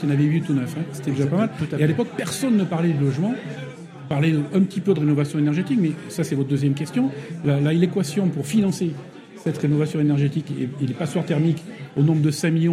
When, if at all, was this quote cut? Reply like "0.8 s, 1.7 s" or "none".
none

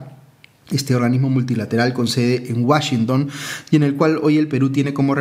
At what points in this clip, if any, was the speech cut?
none

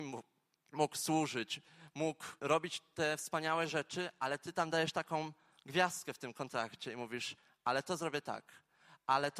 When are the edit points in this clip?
2.4 s

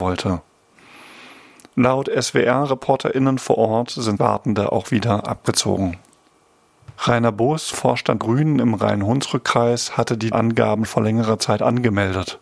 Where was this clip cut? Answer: 4.2 s, 7.7 s, 8.2 s, 10.3 s, 10.8 s

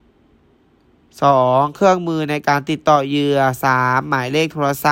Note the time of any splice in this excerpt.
none

